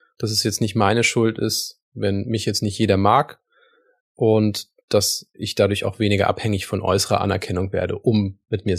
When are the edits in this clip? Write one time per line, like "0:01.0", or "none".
none

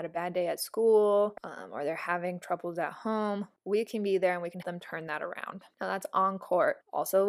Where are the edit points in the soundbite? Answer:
0:03.6
0:04.6

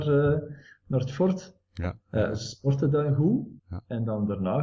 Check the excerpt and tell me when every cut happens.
0:03.6

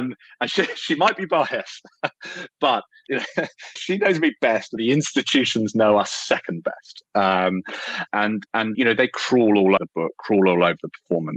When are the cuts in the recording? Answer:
0:03.1
0:03.8
0:04.8
0:08.1
0:08.7
0:09.8

